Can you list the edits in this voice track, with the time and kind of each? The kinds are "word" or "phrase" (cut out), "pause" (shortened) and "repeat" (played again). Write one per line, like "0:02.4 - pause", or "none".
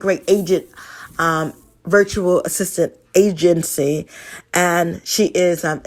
none

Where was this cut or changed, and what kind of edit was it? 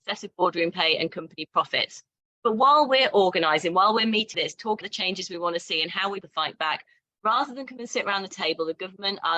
0:04.3 - word
0:04.8 - word
0:06.2 - word

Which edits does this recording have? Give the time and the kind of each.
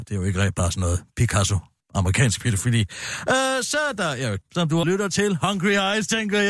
0:01.8 - pause
0:04.4 - word
0:04.8 - word

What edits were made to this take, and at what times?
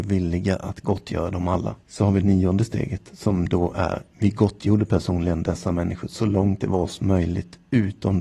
0:01.8 - pause
0:04.1 - pause

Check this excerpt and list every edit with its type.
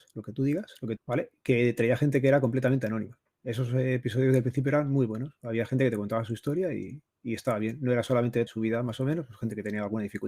0:01.0 - phrase
0:08.5 - phrase

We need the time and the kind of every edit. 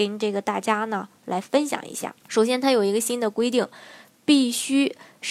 0:02.2 - pause

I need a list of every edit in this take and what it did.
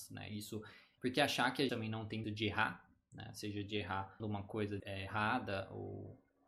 0:01.0 - word
0:01.7 - word
0:02.2 - word
0:04.2 - word
0:04.8 - word

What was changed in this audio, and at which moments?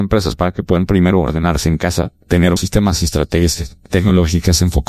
0:02.6 - word

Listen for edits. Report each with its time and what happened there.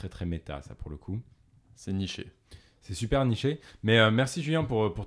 none

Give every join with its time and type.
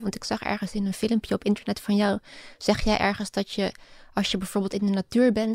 none

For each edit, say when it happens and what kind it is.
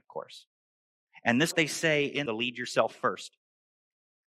0:01.5 - phrase
0:02.3 - phrase

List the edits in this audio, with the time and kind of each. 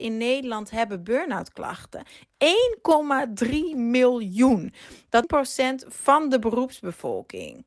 0:05.2 - phrase

